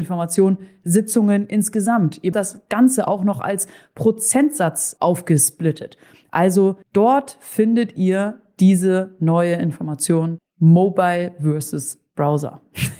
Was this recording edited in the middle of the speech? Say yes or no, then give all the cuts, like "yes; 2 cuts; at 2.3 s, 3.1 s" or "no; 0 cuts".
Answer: yes; 4 cuts; at 2.3 s, 5.0 s, 6.8 s, 10.4 s